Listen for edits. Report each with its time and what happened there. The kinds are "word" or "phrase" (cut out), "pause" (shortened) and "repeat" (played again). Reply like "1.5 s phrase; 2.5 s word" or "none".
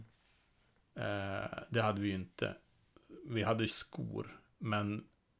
3.7 s phrase